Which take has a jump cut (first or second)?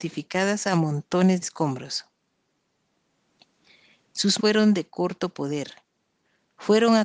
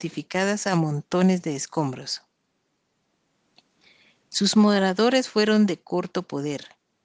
first